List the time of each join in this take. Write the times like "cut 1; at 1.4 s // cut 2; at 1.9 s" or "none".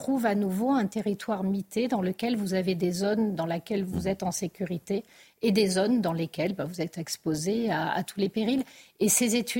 none